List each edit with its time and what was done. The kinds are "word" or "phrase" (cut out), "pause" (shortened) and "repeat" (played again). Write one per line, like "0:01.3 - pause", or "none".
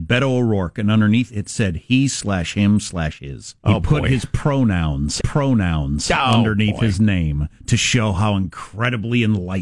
0:01.3 - word
0:03.6 - pause
0:05.2 - repeat
0:07.6 - pause

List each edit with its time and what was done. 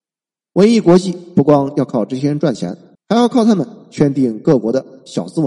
0:02.9 - pause

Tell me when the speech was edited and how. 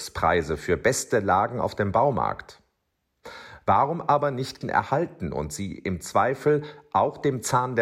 0:04.6 - word

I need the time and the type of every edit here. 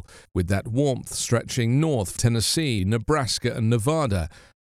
0:02.2 - word
0:02.8 - word

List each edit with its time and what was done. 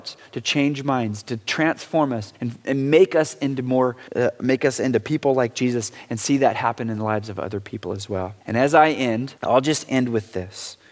0:02.3 - pause
0:04.1 - pause
0:08.4 - pause
0:09.4 - pause

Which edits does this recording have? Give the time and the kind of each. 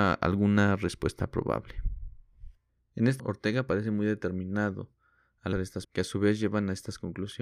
0:03.2 - word
0:05.5 - word
0:05.8 - word

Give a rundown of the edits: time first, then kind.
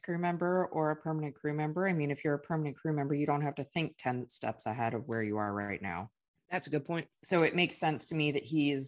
none

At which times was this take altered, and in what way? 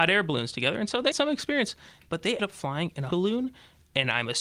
0:01.1 - word
0:02.4 - word
0:03.1 - word

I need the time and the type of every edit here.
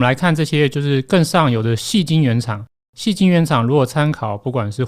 none

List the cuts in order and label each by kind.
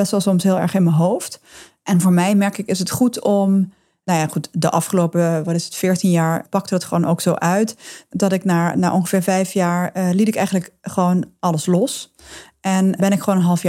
none

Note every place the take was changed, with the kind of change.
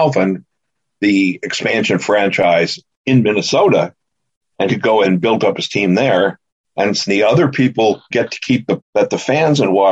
0:04.7 - word
0:05.0 - word
0:07.1 - word
0:08.1 - word
0:08.8 - word

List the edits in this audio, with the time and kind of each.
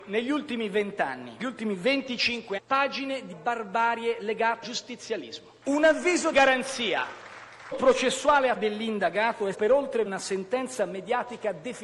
0:01.4 - word
0:02.6 - word
0:03.3 - word
0:04.6 - word
0:06.3 - word
0:07.7 - word
0:08.6 - word
0:09.5 - word
0:10.1 - word

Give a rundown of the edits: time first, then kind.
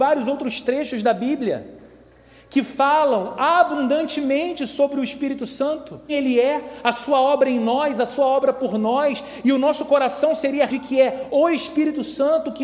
0:06.1 - word
0:10.7 - word

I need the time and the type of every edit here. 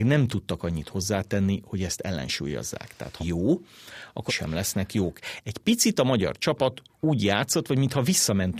0:03.2 - phrase
0:04.3 - phrase

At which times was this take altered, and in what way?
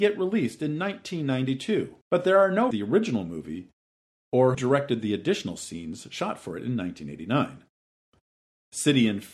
0:02.0 - pause
0:02.7 - phrase
0:04.5 - word

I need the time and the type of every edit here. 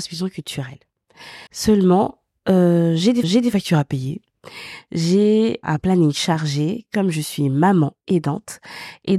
0:01.5 - pause
0:03.2 - repeat
0:05.6 - word

